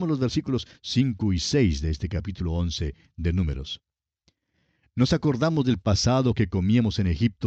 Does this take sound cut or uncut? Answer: uncut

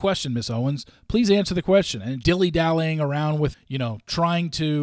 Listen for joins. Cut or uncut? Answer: cut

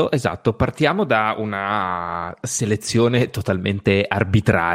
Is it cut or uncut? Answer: uncut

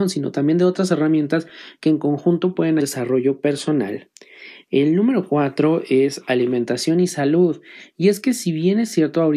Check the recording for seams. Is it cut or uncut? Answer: cut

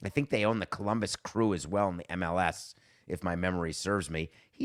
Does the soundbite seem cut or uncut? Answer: uncut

